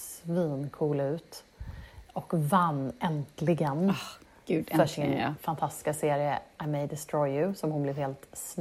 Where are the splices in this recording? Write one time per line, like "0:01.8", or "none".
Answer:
none